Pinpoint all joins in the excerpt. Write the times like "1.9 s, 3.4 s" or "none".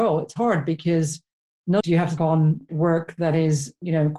1.8 s, 2.2 s, 2.7 s